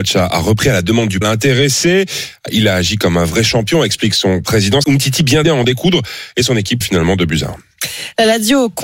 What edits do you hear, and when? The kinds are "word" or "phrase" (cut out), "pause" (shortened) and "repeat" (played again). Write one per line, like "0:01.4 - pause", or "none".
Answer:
0:01.2 - word
0:04.8 - word
0:05.4 - word
0:06.8 - word